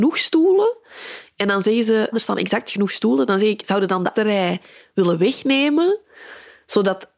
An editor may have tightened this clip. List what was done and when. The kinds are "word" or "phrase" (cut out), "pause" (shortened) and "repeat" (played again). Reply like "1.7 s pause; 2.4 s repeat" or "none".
2.1 s word; 4.2 s word